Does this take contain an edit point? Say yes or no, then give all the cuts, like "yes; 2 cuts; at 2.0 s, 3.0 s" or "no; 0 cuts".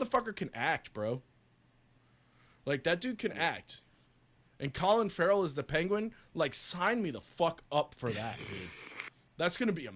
no; 0 cuts